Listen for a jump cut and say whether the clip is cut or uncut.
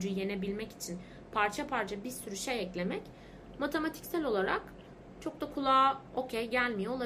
uncut